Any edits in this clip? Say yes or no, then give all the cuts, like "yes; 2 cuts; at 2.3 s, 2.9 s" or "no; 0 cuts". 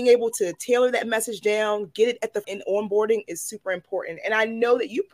yes; 1 cut; at 2.4 s